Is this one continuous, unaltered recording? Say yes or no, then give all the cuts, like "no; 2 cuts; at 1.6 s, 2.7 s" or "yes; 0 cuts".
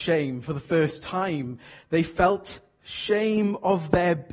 yes; 0 cuts